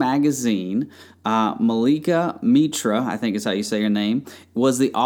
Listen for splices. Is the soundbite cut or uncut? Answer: uncut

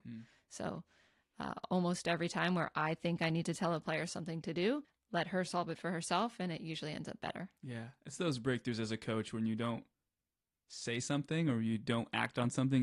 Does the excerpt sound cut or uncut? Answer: uncut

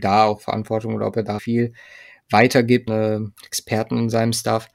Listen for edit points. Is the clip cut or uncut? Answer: cut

